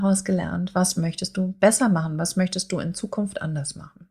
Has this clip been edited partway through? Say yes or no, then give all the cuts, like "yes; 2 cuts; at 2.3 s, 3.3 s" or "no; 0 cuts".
no; 0 cuts